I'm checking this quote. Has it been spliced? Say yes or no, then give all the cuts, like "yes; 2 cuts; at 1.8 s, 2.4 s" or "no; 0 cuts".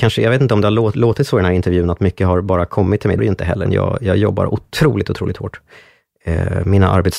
yes; 2 cuts; at 3.2 s, 3.7 s